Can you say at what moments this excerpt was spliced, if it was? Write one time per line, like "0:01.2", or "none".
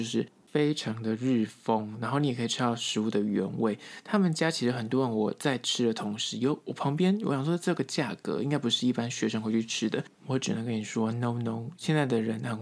0:10.2